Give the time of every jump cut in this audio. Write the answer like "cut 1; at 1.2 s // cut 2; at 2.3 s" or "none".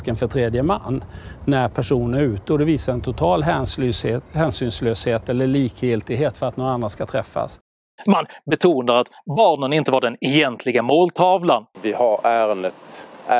none